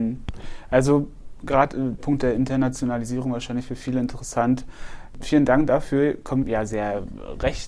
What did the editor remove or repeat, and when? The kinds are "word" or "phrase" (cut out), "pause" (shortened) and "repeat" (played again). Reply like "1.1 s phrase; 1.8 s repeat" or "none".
2.0 s word; 6.4 s phrase